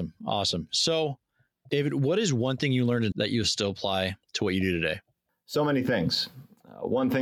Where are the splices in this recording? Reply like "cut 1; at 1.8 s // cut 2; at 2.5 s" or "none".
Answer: cut 1; at 3.1 s // cut 2; at 4.2 s // cut 3; at 5.1 s